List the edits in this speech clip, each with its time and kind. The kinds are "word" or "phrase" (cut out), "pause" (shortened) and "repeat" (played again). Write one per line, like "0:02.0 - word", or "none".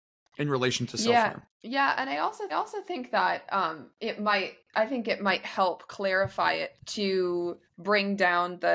0:01.5 - pause
0:02.5 - repeat
0:06.8 - word
0:07.7 - pause